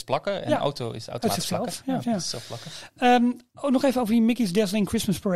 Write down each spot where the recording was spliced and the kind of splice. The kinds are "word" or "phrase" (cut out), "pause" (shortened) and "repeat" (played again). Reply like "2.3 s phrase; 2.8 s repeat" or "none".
2.0 s word